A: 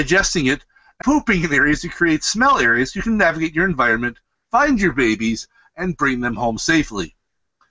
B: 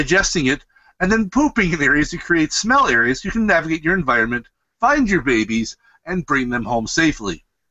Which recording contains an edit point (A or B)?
A